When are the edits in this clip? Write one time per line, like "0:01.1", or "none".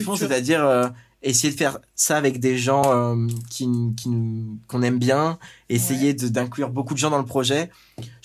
none